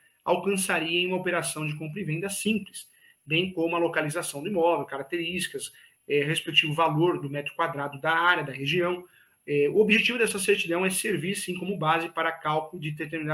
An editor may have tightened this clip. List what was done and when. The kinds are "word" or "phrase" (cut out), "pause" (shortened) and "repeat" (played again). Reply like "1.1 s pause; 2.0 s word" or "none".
none